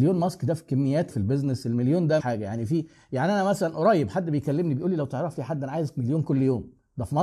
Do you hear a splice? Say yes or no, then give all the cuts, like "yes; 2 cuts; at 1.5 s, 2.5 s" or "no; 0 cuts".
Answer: yes; 2 cuts; at 1.1 s, 2.2 s